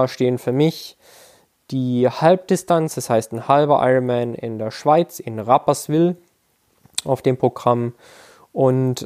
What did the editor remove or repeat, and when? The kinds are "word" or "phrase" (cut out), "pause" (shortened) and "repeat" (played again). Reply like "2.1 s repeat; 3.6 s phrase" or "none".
none